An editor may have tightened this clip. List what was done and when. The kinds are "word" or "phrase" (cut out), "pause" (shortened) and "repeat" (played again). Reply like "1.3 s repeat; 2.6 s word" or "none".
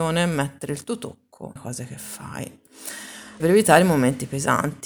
1.6 s word; 3.4 s word